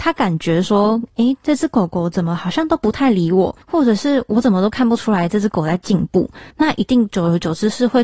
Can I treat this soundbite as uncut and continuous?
no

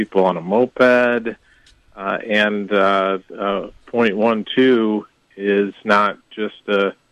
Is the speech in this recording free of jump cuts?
yes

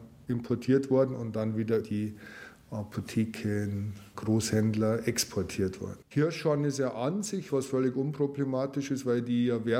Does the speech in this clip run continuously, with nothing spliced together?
no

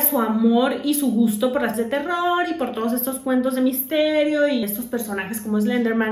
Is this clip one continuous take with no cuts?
no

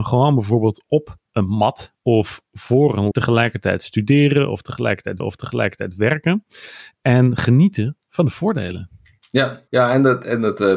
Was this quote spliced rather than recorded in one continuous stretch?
yes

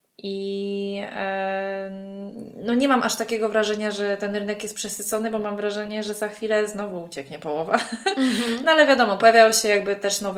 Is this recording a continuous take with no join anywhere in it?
yes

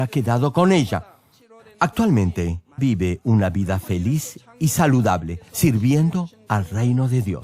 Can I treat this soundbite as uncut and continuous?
no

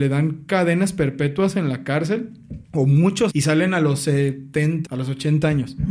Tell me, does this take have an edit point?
yes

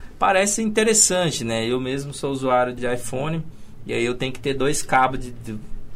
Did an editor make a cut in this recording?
yes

